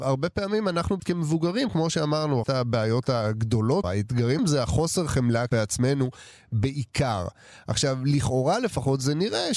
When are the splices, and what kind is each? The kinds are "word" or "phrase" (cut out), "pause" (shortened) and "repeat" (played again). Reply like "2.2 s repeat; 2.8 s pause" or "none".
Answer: 1.0 s word; 1.7 s word; 2.4 s word; 3.8 s word; 4.4 s word; 5.5 s word